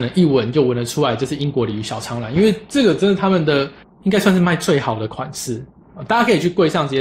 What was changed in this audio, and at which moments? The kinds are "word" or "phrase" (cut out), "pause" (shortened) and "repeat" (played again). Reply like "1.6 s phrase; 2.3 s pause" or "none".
3.8 s pause